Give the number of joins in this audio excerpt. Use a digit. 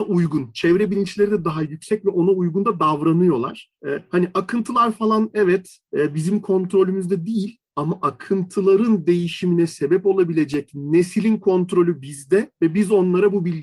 0